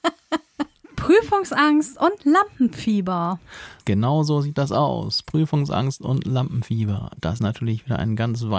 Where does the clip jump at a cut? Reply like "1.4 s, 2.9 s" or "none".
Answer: 3.8 s, 7.4 s